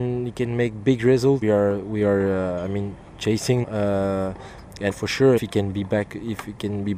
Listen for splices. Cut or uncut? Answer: cut